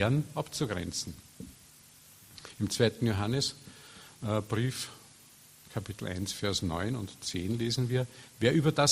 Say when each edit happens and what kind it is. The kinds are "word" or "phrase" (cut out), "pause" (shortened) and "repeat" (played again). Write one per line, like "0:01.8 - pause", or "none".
none